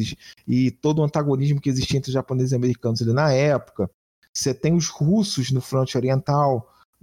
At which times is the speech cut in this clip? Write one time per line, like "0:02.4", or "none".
none